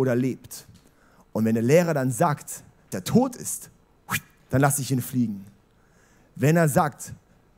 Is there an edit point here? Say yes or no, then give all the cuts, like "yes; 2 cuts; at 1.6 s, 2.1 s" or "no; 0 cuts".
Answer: yes; 1 cut; at 2.9 s